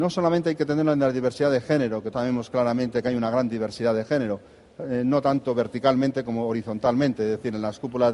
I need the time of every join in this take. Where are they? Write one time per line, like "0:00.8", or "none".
0:02.1